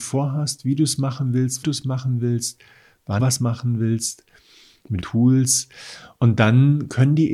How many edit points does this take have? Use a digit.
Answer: 3